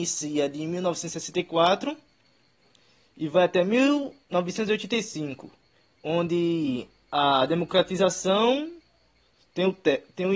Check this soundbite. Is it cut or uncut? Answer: uncut